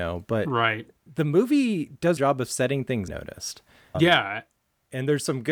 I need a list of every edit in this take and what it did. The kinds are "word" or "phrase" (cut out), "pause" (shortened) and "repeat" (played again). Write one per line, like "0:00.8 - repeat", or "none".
0:02.2 - phrase
0:03.1 - phrase
0:03.9 - word